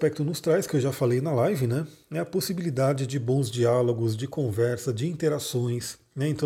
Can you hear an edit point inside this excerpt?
no; 0 cuts

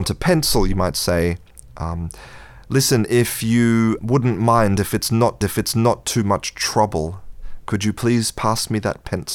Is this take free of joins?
no; 2 cuts; at 4.0 s, 5.4 s

